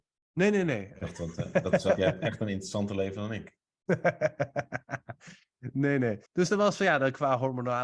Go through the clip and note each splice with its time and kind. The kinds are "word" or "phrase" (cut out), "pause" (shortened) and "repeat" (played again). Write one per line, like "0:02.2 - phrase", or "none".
0:02.0 - word
0:06.3 - pause